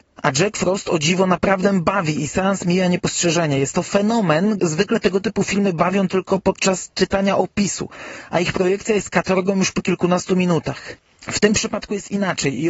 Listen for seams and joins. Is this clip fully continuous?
no; 1 cut; at 4.6 s

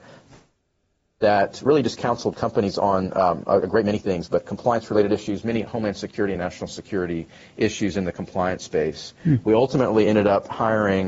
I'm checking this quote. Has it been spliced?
no; 0 cuts

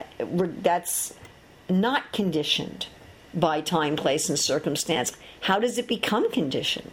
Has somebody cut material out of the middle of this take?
no; 0 cuts

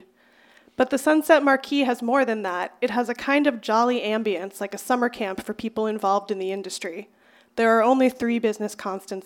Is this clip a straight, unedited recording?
yes; 0 cuts

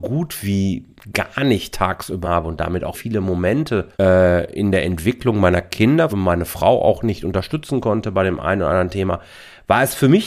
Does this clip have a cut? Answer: yes; 4 cuts; at 2.2 s, 2.9 s, 3.9 s, 6.1 s

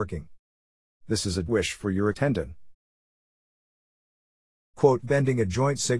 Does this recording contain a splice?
yes; 3 cuts; at 1.5 s, 2.1 s, 5.0 s

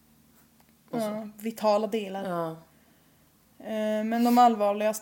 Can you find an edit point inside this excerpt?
no; 0 cuts

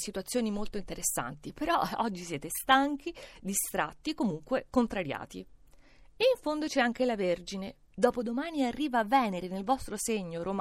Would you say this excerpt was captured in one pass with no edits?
yes; 0 cuts

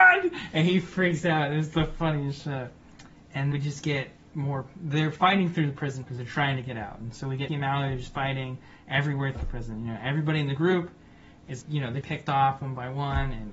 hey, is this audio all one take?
no; 6 cuts; at 3.5 s, 6.0 s, 7.5 s, 9.4 s, 11.6 s, 12.0 s

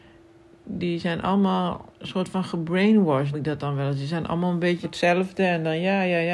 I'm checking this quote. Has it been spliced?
yes; 3 cuts; at 1.9 s, 3.3 s, 4.8 s

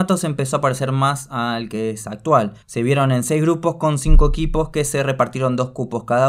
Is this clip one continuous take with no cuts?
no; 1 cut; at 2.6 s

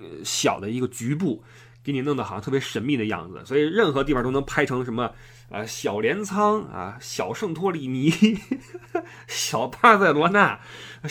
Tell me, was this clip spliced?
no; 0 cuts

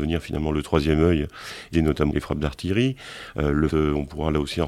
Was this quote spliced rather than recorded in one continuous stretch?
yes; 3 cuts; at 1.7 s, 2.1 s, 3.7 s

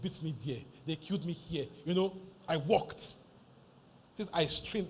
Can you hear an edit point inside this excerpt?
yes; 1 cut; at 2.4 s

